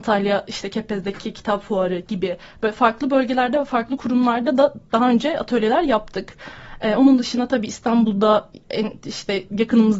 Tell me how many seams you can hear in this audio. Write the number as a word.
zero